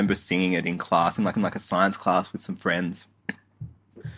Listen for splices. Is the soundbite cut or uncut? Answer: cut